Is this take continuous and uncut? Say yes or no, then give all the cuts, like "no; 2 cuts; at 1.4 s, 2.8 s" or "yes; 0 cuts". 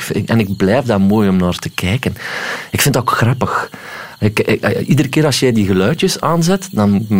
yes; 0 cuts